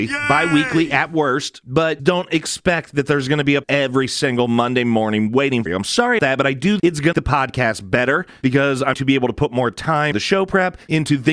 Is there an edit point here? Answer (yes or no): yes